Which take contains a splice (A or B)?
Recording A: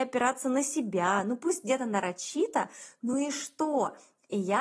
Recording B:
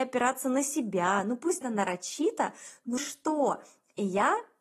B